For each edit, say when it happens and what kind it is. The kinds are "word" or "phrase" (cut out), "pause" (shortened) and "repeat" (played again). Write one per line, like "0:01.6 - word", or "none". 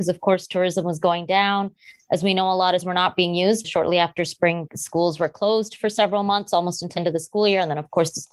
0:02.8 - word
0:03.6 - word
0:04.7 - word
0:07.0 - word